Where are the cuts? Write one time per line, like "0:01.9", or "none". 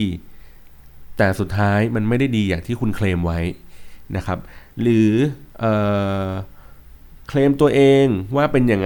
0:05.5